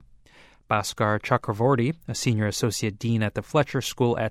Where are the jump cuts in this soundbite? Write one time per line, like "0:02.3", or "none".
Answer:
none